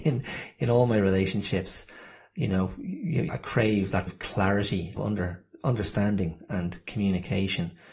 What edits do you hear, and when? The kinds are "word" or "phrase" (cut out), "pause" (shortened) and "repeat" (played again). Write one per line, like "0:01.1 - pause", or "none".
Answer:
0:03.3 - word
0:04.1 - word
0:05.0 - word